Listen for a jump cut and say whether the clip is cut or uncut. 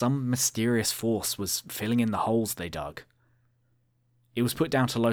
uncut